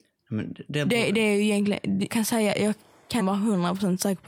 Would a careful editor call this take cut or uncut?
cut